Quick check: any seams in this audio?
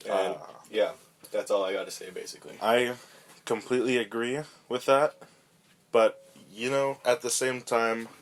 no; 0 cuts

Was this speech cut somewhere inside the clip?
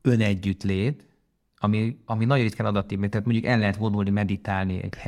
no; 0 cuts

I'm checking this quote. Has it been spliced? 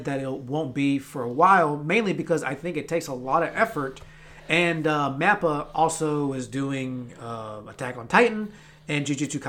no; 0 cuts

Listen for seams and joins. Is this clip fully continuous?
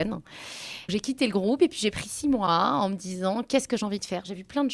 yes; 0 cuts

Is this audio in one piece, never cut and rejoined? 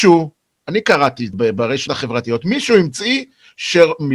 no; 2 cuts; at 1.3 s, 1.9 s

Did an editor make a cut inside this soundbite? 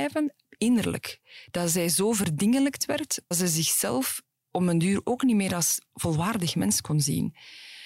yes; 1 cut; at 3.3 s

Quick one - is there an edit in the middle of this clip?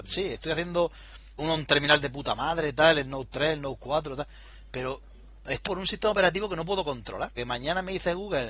yes; 3 cuts; at 1.4 s, 5.7 s, 7.4 s

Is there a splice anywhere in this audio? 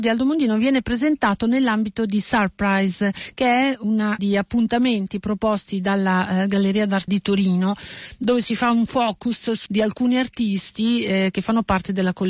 yes; 3 cuts; at 4.2 s, 7.1 s, 9.7 s

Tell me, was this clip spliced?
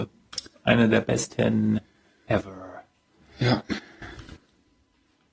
no; 0 cuts

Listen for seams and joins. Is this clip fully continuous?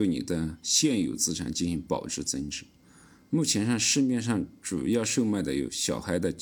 yes; 0 cuts

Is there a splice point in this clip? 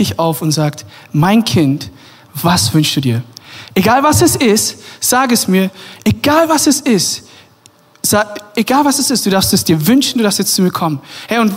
no; 0 cuts

